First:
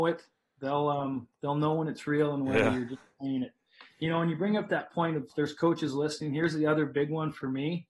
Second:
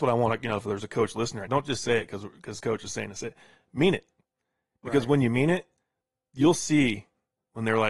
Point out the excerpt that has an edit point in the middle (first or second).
second